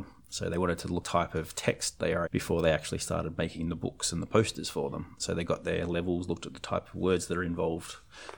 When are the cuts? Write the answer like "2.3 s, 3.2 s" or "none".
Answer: 1.0 s, 2.3 s